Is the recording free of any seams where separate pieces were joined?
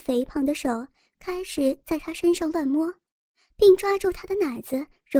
yes; 0 cuts

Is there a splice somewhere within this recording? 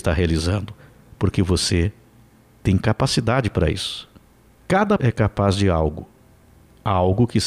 yes; 2 cuts; at 1.0 s, 5.0 s

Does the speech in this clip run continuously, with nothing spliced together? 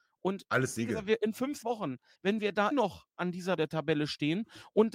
no; 4 cuts; at 1.6 s, 2.1 s, 2.7 s, 3.6 s

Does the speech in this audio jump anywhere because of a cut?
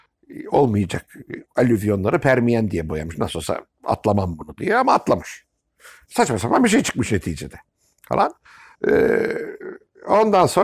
no; 0 cuts

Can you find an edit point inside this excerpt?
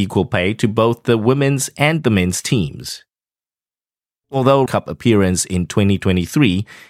yes; 1 cut; at 4.7 s

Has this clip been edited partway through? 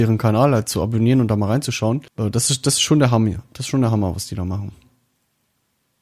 yes; 1 cut; at 2.1 s

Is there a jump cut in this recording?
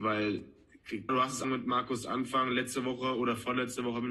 yes; 2 cuts; at 1.1 s, 1.4 s

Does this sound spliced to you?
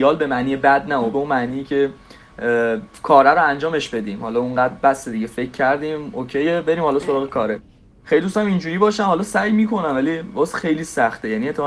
yes; 1 cut; at 1.1 s

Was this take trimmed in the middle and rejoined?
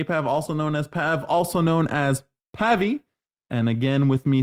no; 0 cuts

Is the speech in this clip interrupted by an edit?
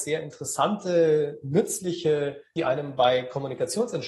yes; 1 cut; at 2.6 s

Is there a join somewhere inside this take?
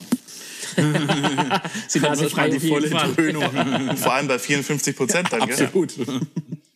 no; 0 cuts

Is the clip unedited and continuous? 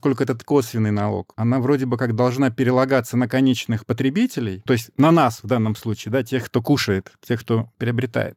no; 1 cut; at 4.7 s

